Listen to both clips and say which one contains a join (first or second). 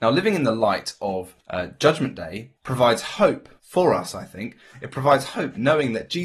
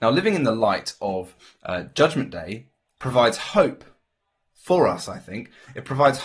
first